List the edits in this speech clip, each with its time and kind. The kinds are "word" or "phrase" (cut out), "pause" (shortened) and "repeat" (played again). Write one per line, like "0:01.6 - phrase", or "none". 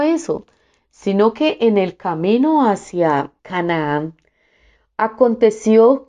0:03.4 - pause